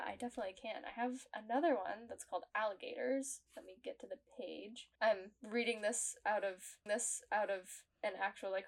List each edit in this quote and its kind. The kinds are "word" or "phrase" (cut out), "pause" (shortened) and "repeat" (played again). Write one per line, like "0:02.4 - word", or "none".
0:03.5 - pause
0:05.0 - pause
0:06.9 - repeat